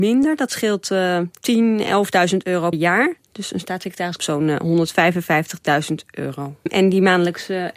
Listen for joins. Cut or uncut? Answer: cut